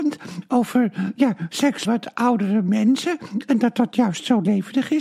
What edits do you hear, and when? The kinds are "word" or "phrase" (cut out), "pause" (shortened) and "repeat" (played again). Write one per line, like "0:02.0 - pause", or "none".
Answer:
0:01.1 - word
0:01.8 - word